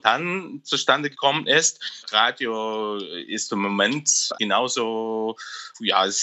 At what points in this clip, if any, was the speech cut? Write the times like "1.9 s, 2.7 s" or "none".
4.3 s